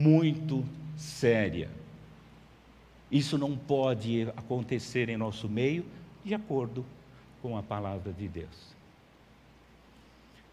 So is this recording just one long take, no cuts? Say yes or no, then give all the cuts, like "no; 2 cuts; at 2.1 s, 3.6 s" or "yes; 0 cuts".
yes; 0 cuts